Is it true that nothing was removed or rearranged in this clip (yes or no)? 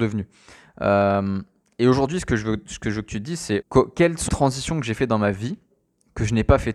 no